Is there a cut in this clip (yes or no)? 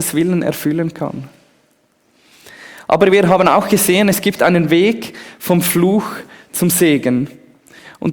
no